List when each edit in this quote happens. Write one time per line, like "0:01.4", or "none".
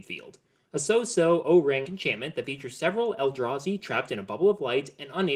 0:01.8